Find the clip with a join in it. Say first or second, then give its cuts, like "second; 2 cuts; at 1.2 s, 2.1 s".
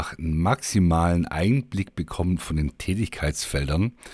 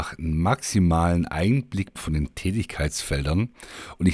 second; 1 cut; at 2.0 s